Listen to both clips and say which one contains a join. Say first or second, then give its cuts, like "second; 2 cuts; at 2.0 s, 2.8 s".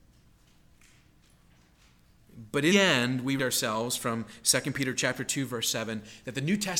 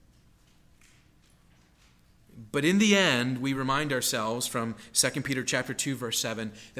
first; 2 cuts; at 2.7 s, 3.4 s